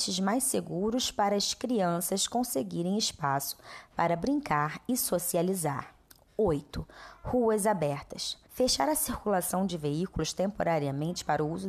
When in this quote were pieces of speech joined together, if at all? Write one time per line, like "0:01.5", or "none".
0:06.0
0:08.4